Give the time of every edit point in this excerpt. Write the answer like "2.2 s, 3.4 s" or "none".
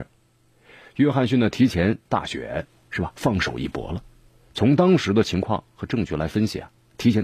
2.1 s